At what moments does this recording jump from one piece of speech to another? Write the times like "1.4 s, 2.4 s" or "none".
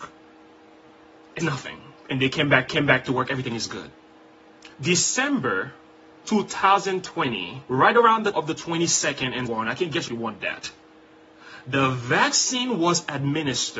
1.4 s, 2.7 s, 4.7 s, 7.7 s, 8.3 s, 9.5 s, 10.1 s